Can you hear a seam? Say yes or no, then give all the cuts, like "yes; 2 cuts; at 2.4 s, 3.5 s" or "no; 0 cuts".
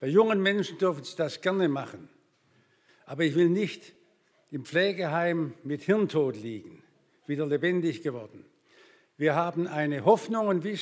no; 0 cuts